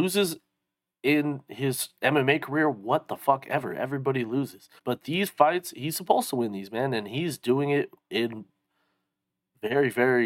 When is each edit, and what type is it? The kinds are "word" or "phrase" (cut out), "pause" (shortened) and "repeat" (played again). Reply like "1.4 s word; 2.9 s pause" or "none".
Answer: 4.8 s pause